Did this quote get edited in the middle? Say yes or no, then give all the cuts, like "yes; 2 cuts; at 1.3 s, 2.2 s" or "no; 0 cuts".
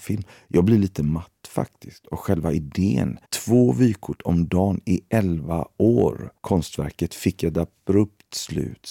yes; 2 cuts; at 3.3 s, 6.4 s